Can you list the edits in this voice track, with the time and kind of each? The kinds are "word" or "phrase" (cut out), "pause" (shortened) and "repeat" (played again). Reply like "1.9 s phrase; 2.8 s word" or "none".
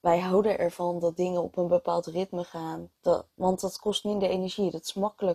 3.0 s pause